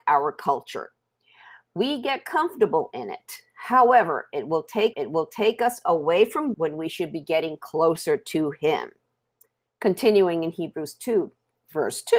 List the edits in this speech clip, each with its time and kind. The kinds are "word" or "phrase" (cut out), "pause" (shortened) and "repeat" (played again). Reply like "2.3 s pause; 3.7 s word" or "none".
4.9 s repeat; 6.5 s word